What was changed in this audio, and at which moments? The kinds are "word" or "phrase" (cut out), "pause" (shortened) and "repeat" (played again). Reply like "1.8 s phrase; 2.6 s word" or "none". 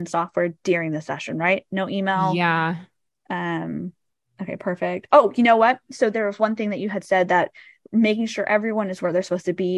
none